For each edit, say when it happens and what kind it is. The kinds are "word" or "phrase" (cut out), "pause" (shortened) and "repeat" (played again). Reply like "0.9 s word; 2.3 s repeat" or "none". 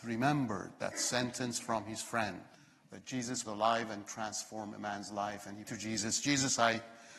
2.5 s pause; 3.4 s word; 4.1 s word; 5.6 s word